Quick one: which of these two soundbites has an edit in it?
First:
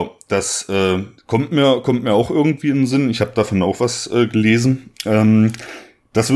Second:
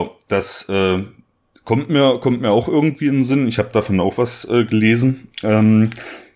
first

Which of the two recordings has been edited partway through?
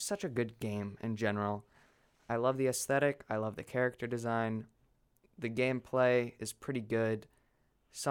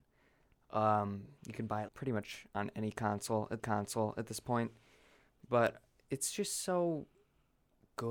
second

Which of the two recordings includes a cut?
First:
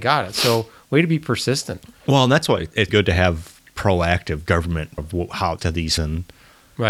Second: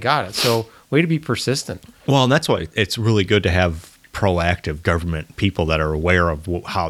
first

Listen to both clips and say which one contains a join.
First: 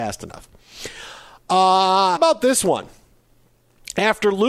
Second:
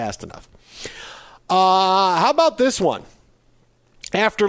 first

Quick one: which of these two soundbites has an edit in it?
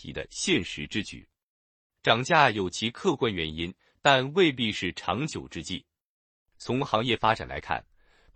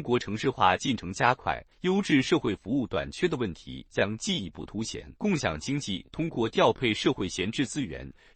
second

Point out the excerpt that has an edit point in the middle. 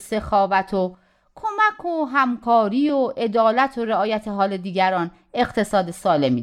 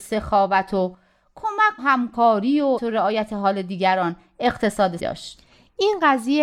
second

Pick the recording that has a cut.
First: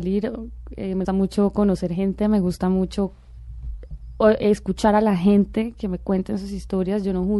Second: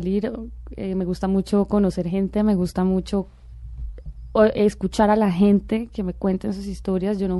first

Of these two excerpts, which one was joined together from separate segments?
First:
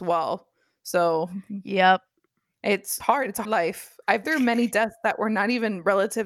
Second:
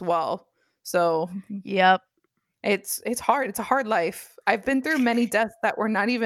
first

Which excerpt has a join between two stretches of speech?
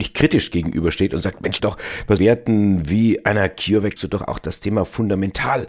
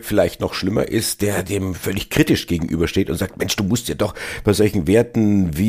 first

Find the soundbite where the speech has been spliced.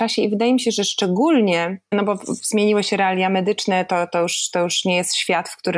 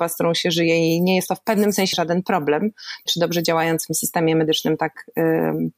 second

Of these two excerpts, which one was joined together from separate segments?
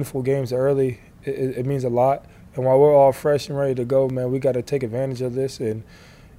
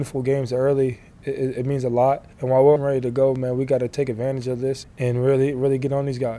second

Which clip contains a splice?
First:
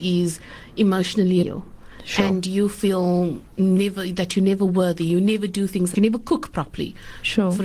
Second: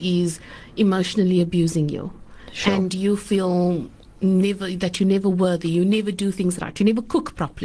first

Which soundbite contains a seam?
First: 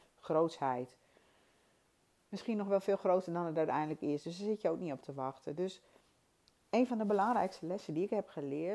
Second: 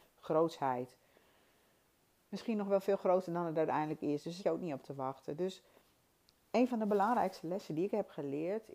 second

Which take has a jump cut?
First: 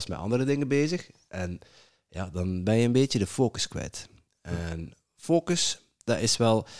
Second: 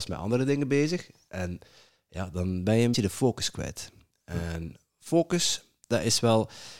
second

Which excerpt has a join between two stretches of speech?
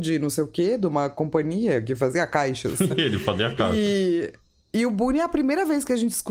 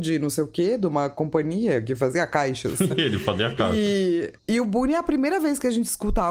second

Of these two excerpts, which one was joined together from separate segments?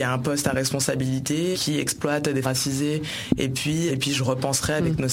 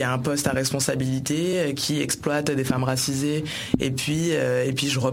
first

